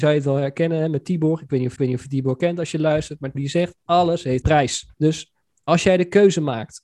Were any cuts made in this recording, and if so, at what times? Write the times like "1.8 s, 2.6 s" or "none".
1.8 s, 3.3 s, 4.4 s, 4.9 s